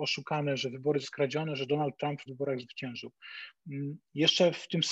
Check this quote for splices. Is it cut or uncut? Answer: cut